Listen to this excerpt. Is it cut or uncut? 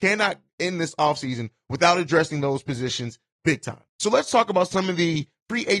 cut